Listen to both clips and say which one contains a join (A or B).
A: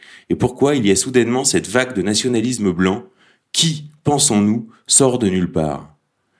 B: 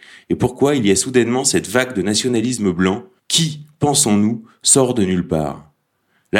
B